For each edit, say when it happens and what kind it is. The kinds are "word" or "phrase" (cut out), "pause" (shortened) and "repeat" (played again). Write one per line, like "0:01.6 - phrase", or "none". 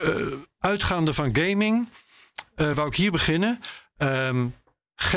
none